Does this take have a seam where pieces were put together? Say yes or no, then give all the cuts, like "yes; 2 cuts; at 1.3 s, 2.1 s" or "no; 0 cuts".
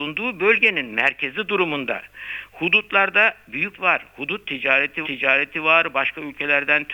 yes; 2 cuts; at 3.7 s, 5.0 s